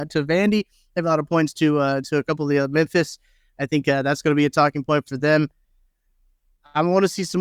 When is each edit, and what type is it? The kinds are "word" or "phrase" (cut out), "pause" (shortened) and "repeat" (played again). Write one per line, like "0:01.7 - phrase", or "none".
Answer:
none